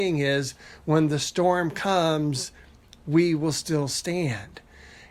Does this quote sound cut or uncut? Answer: uncut